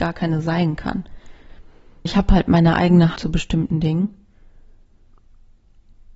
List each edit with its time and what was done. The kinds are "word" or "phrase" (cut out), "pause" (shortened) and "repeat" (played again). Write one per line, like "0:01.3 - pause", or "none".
0:02.1 - word
0:03.2 - word